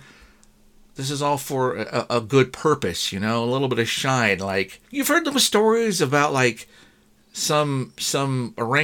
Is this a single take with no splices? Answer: no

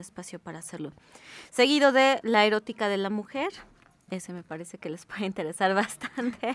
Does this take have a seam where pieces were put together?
no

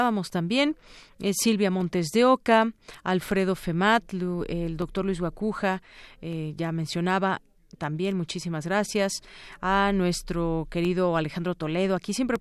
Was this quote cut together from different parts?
no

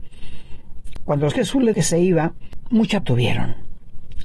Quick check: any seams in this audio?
yes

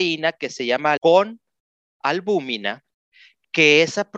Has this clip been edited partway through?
yes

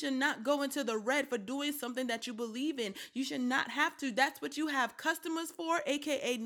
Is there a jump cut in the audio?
no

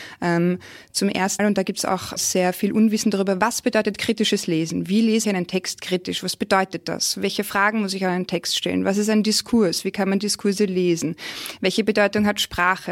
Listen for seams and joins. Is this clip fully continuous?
no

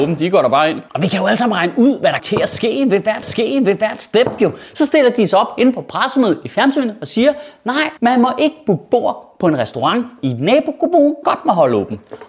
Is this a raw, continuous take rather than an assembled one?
no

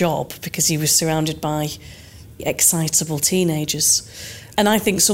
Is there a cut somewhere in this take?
yes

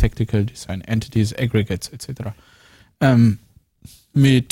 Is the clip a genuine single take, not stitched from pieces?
yes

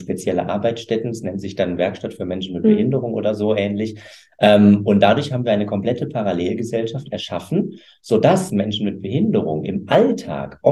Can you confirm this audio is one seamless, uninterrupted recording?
yes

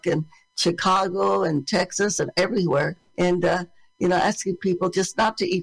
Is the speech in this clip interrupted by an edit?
no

